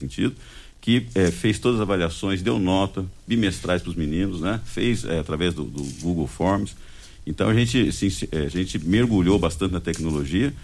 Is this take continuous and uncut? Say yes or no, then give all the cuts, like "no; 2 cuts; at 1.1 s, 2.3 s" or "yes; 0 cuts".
yes; 0 cuts